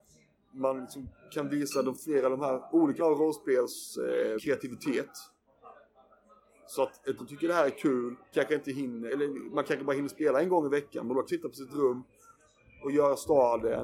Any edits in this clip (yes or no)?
yes